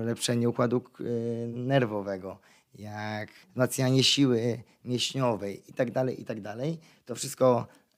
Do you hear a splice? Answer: no; 0 cuts

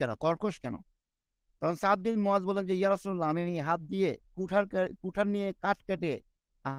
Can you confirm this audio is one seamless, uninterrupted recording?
no; 1 cut; at 4.2 s

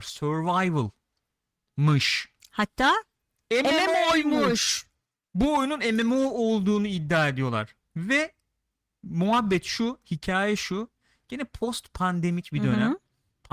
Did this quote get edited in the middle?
no; 0 cuts

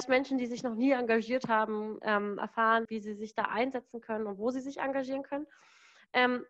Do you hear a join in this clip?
yes; 1 cut; at 2.8 s

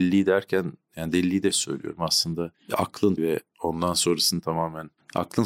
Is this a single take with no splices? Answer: no; 2 cuts; at 1.5 s, 3.2 s

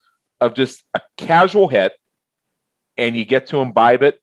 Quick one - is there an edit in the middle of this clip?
no; 0 cuts

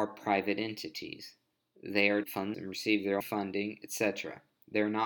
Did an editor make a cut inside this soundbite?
yes; 3 cuts; at 2.2 s, 2.5 s, 3.2 s

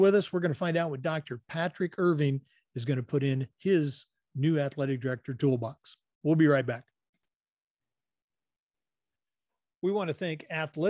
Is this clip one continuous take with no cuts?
yes; 0 cuts

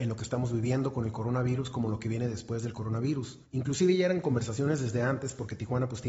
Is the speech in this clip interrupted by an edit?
yes; 1 cut; at 3.4 s

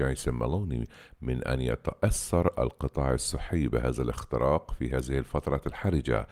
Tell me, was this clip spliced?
no; 0 cuts

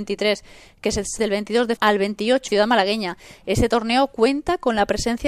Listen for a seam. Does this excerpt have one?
yes; 3 cuts; at 1.2 s, 1.8 s, 2.5 s

